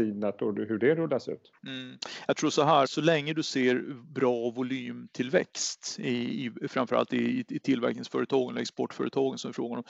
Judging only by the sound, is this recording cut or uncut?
cut